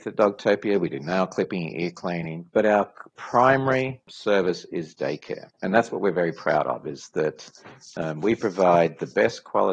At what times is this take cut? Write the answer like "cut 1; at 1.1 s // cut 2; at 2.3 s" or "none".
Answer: cut 1; at 2.5 s // cut 2; at 5.5 s